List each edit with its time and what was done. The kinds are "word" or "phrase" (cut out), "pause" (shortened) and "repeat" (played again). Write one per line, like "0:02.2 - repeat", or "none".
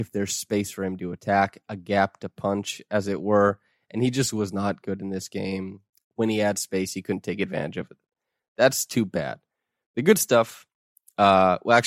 none